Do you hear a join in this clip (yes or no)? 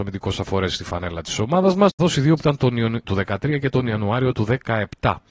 yes